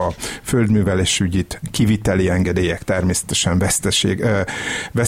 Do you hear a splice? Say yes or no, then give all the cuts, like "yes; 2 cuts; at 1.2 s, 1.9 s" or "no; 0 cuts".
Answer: no; 0 cuts